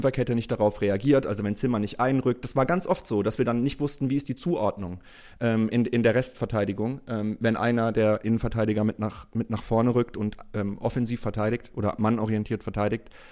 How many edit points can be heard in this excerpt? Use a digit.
0